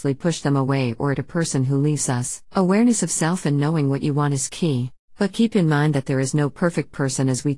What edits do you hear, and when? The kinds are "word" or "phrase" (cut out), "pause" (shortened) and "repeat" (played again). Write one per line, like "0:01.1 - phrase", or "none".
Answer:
0:01.1 - word
0:02.5 - pause
0:05.0 - pause